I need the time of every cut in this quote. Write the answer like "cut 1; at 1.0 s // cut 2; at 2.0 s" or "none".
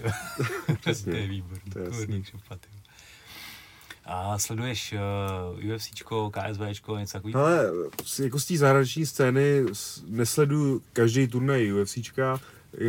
cut 1; at 4.0 s